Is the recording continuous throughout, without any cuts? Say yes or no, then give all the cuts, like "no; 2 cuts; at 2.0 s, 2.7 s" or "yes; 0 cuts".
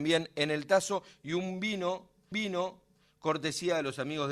no; 1 cut; at 2.3 s